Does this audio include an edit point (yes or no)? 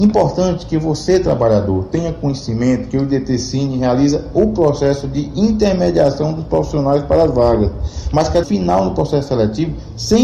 yes